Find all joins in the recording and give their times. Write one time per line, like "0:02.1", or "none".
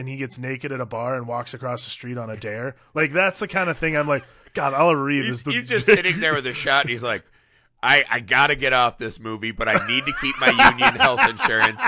none